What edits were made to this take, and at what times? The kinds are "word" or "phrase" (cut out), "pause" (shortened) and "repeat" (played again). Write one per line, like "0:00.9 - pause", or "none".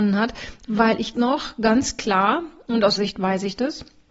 0:01.1 - word
0:03.0 - word